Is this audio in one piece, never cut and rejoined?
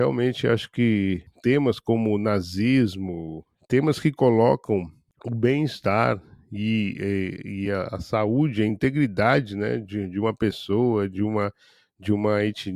yes; 0 cuts

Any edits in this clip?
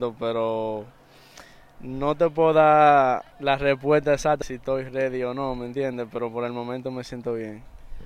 yes; 2 cuts; at 3.3 s, 4.4 s

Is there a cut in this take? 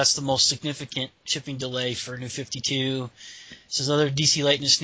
yes; 1 cut; at 1.2 s

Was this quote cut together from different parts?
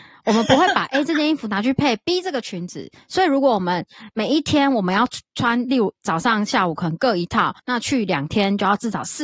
yes; 1 cut; at 7.6 s

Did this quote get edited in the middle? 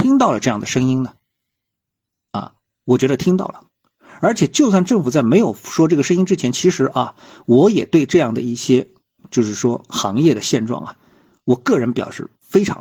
no; 0 cuts

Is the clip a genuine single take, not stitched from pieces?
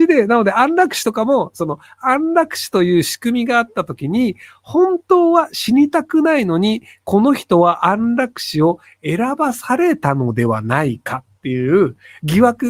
yes; 0 cuts

